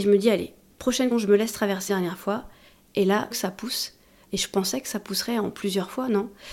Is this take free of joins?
no; 3 cuts; at 1.1 s, 1.9 s, 3.3 s

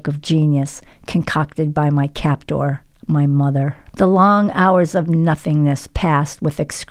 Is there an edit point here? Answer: yes; 1 cut; at 3.9 s

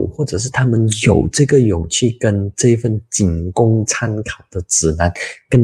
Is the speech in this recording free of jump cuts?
yes; 0 cuts

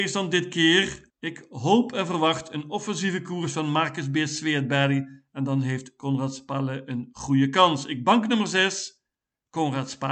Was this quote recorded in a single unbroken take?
yes; 0 cuts

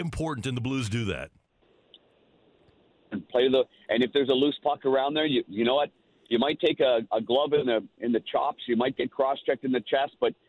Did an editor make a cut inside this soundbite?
no; 0 cuts

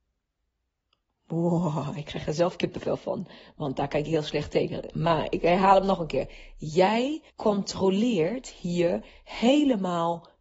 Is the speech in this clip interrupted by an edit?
yes; 1 cut; at 7.3 s

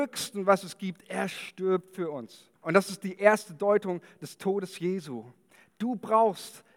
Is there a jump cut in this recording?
yes; 1 cut; at 2.6 s

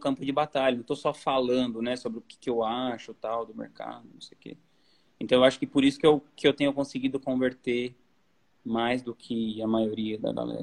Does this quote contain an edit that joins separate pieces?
no; 0 cuts

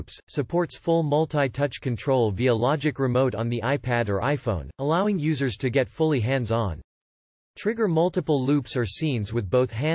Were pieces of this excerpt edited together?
no; 0 cuts

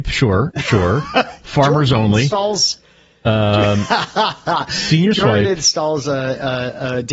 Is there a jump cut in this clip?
no; 0 cuts

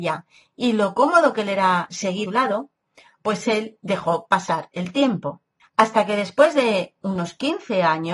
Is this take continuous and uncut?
no; 2 cuts; at 2.2 s, 5.6 s

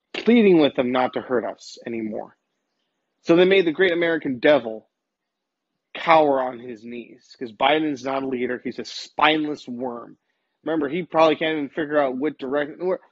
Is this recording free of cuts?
yes; 0 cuts

